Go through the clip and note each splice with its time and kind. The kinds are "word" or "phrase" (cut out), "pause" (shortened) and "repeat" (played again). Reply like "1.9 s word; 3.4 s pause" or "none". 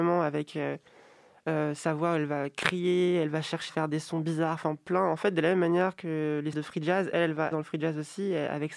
3.7 s word; 6.5 s word; 7.5 s phrase

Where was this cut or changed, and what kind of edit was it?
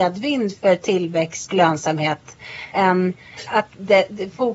1.5 s word; 2.7 s word; 3.5 s word

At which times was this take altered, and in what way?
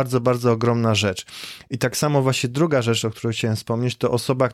none

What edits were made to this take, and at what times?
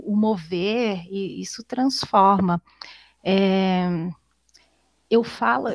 none

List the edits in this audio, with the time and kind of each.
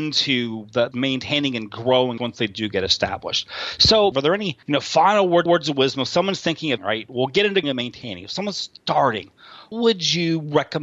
0.9 s word; 2.2 s phrase; 4.1 s phrase; 4.6 s pause; 5.5 s repeat; 6.8 s word; 7.6 s word; 9.7 s word

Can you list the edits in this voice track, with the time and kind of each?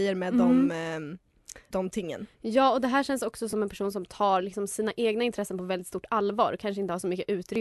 1.7 s word

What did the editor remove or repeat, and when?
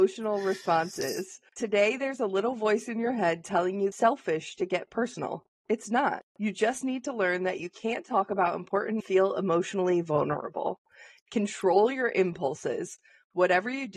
1.5 s pause; 3.9 s phrase; 6.3 s pause; 9.0 s phrase

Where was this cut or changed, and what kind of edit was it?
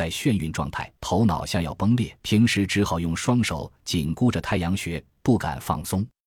1.0 s pause; 2.2 s pause

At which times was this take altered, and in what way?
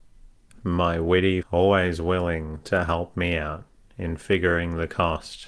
1.4 s word

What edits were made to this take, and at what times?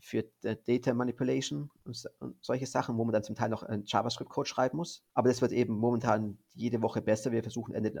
5.1 s pause

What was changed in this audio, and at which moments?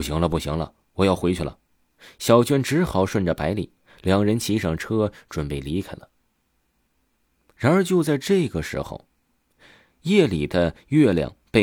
none

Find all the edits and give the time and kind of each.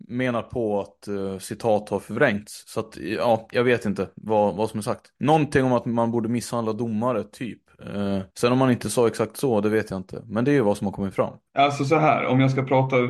5.2 s pause; 8.3 s pause; 11.5 s pause

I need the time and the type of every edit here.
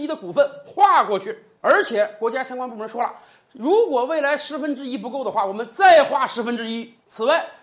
none

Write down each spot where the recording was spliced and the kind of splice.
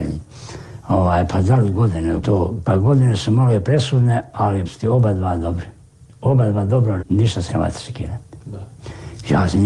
2.2 s word; 2.6 s word; 4.7 s word; 7.0 s word; 7.5 s word

